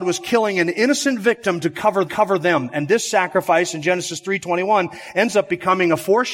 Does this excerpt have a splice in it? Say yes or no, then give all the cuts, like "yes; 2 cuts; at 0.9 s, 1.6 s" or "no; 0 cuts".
yes; 1 cut; at 2.1 s